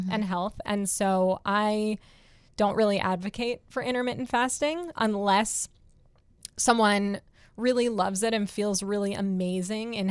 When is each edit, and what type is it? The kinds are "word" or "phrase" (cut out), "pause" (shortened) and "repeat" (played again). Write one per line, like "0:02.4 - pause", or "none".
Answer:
0:05.0 - word